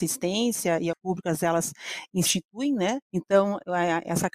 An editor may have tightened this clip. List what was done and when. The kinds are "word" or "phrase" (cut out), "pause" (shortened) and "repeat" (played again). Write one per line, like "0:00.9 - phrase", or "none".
0:00.9 - phrase
0:03.0 - pause